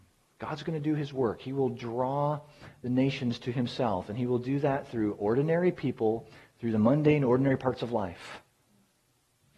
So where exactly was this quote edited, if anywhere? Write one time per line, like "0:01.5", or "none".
none